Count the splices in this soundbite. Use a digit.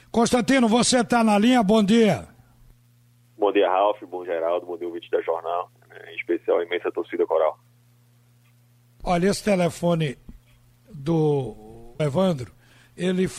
2